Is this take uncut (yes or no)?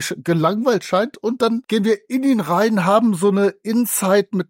no